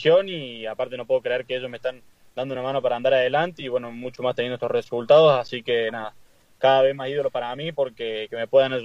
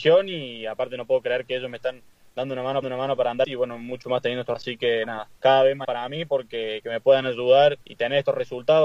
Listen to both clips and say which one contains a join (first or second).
second